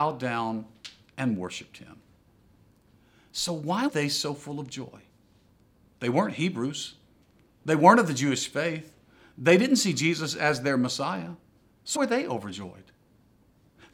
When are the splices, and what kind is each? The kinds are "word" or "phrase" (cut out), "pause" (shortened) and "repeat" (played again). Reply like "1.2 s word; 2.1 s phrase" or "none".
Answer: 3.9 s word; 12.0 s word